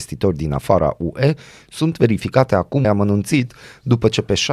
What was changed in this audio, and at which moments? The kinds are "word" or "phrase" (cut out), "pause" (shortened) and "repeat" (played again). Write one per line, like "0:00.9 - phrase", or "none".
0:02.8 - phrase